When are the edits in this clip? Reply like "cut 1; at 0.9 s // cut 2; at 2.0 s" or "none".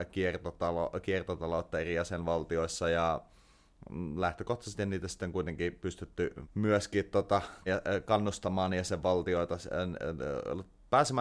cut 1; at 6.4 s // cut 2; at 7.7 s